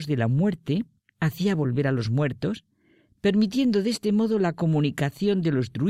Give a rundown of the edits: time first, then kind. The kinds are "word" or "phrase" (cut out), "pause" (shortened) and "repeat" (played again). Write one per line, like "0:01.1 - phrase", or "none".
0:01.0 - pause